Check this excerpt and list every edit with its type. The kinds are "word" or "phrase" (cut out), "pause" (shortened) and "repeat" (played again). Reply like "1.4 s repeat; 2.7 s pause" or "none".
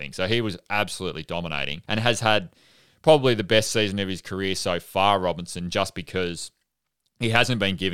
1.8 s pause